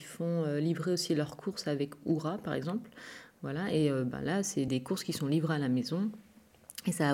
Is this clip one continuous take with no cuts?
yes; 0 cuts

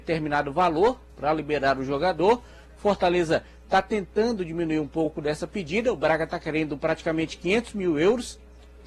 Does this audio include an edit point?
no; 0 cuts

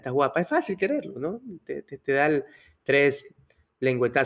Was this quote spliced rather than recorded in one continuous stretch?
no; 0 cuts

